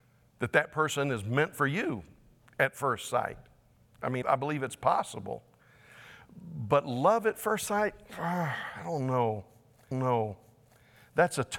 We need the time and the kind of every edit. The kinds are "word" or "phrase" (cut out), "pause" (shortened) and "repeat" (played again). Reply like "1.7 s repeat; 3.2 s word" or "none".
4.2 s word; 9.9 s repeat